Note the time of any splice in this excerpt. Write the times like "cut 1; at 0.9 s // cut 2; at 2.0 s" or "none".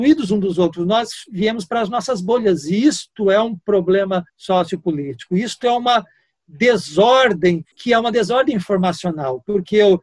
cut 1; at 4.3 s // cut 2; at 7.7 s